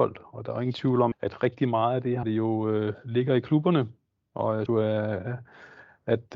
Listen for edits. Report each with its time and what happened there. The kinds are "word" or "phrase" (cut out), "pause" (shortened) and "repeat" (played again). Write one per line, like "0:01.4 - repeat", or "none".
0:01.1 - word
0:02.2 - word
0:04.7 - word

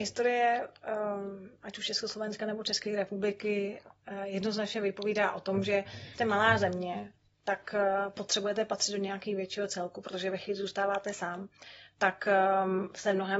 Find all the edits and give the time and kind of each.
0:06.1 - word

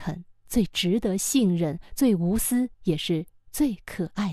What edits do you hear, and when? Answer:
0:02.7 - pause

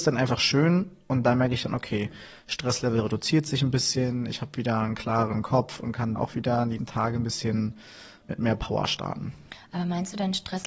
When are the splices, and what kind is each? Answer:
0:06.2 - word
0:06.8 - word

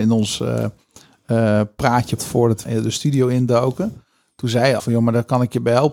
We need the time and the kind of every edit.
0:02.2 - word
0:02.6 - word
0:04.8 - word

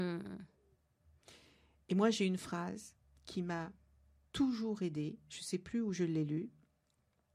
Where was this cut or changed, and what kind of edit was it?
0:03.0 - pause

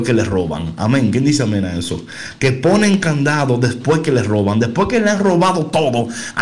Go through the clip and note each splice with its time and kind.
none

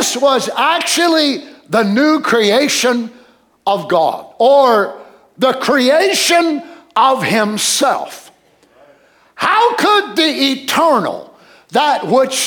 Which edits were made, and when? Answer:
none

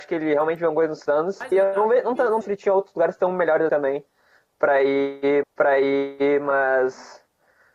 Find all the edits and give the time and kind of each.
0:01.5 - word
0:02.4 - word
0:03.7 - word
0:05.4 - repeat

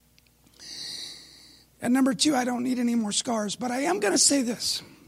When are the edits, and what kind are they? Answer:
none

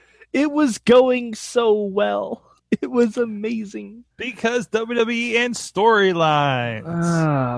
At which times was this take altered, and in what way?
0:02.6 - pause
0:04.1 - pause

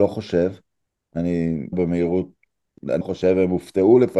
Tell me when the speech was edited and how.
0:01.7 - word
0:03.0 - word

